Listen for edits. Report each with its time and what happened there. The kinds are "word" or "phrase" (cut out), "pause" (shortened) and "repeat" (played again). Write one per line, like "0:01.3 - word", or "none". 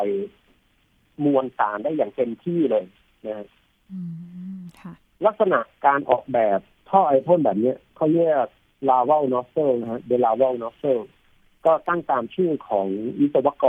none